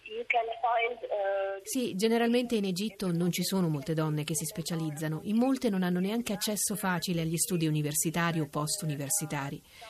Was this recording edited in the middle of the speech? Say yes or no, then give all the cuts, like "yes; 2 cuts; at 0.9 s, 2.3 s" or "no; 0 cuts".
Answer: no; 0 cuts